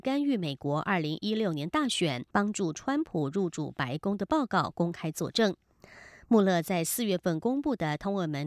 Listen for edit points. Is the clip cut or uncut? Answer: cut